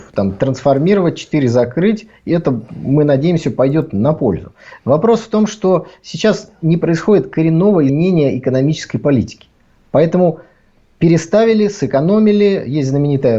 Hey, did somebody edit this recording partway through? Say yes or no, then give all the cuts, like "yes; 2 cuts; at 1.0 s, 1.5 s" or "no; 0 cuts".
yes; 1 cut; at 7.9 s